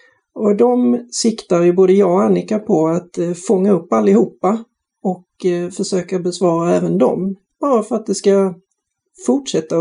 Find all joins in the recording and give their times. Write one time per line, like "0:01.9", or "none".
none